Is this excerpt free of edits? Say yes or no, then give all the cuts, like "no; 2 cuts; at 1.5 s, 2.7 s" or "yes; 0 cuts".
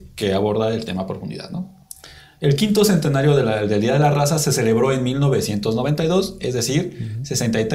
yes; 0 cuts